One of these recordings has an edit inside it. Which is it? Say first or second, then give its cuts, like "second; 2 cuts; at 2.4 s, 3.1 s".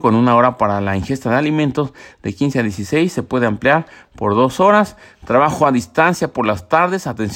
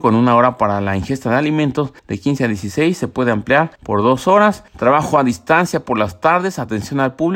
second; 3 cuts; at 2.0 s, 3.8 s, 4.7 s